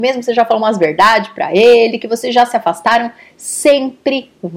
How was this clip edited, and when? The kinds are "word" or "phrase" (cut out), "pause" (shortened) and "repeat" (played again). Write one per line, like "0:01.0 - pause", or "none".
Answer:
none